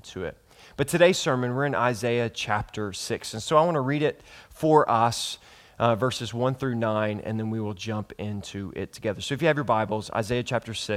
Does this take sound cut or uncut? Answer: uncut